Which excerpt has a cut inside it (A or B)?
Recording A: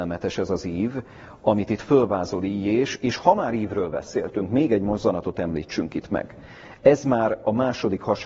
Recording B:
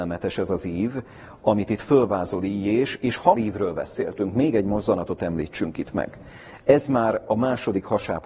B